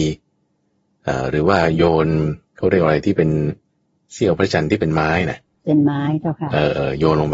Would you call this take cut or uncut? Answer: cut